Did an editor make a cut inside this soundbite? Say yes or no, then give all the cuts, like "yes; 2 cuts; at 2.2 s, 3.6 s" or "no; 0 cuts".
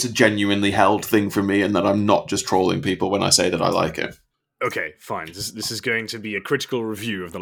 yes; 1 cut; at 4.3 s